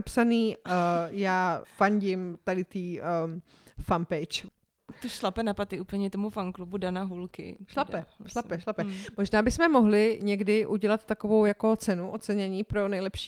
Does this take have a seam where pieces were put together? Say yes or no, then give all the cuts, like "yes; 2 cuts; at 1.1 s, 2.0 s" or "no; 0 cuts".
no; 0 cuts